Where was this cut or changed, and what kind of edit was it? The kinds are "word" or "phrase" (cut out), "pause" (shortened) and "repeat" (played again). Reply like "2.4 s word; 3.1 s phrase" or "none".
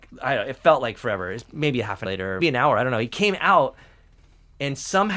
2.0 s word; 2.4 s word